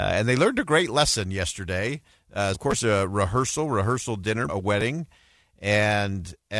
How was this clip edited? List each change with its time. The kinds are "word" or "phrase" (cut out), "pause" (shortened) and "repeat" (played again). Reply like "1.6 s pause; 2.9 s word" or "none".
2.5 s word; 4.5 s word